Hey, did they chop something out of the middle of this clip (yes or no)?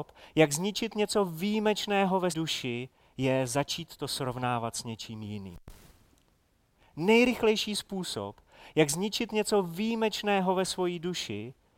yes